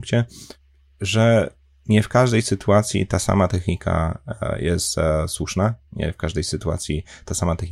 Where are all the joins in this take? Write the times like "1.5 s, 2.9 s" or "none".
none